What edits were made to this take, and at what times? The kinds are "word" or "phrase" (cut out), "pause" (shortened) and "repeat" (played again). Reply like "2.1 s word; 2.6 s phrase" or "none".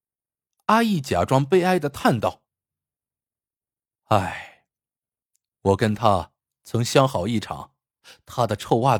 none